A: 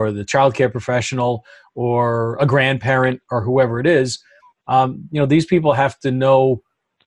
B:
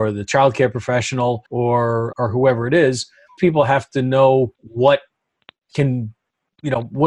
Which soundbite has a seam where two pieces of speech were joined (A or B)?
B